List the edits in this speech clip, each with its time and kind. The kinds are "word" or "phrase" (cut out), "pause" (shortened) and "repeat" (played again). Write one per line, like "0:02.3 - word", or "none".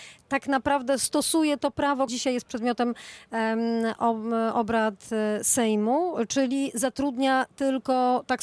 0:02.1 - word